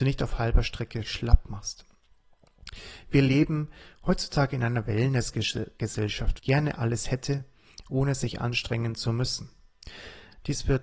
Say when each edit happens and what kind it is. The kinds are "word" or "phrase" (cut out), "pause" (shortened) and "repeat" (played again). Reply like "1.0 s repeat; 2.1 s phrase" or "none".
1.0 s word; 6.4 s phrase